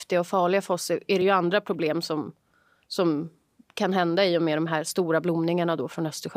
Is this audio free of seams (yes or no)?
yes